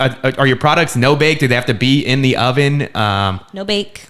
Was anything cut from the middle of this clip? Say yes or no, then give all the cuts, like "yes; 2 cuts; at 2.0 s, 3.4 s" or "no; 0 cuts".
no; 0 cuts